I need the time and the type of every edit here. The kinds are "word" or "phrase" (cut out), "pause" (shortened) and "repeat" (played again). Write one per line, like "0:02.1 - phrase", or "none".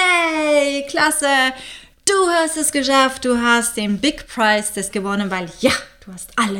0:04.9 - word